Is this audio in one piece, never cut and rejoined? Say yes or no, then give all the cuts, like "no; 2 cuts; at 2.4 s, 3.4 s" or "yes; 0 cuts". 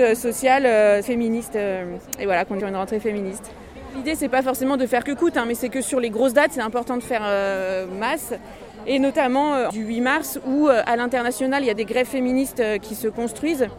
no; 5 cuts; at 1.0 s, 2.6 s, 5.0 s, 9.7 s, 11.8 s